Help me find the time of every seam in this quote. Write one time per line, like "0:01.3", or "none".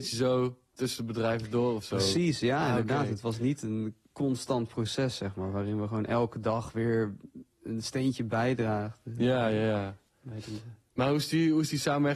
0:04.0
0:10.1